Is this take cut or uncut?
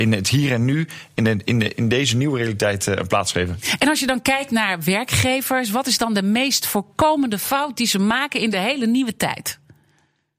cut